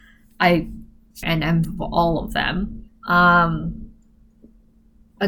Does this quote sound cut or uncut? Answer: cut